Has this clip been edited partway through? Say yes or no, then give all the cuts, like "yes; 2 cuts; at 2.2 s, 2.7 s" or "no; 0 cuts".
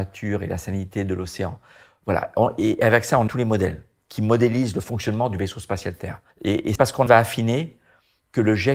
yes; 4 cuts; at 3.3 s, 6.3 s, 6.8 s, 7.1 s